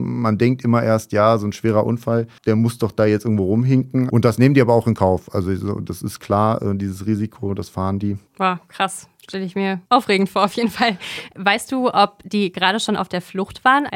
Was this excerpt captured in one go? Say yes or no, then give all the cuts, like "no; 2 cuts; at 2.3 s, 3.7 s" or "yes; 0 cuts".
no; 2 cuts; at 8.3 s, 9.9 s